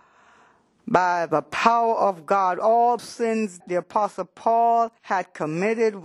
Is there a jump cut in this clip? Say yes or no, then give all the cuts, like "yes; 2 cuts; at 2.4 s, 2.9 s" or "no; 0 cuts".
yes; 3 cuts; at 3.0 s, 3.6 s, 5.0 s